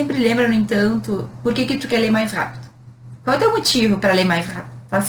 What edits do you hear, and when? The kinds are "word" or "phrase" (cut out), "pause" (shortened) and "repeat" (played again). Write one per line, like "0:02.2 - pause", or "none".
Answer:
none